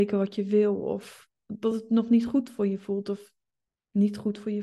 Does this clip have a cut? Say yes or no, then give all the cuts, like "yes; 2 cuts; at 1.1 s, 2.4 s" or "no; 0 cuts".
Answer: no; 0 cuts